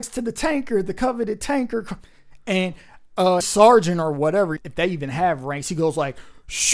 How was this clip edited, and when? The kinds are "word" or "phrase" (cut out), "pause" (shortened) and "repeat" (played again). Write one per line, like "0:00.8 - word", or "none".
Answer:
0:03.4 - word
0:04.6 - word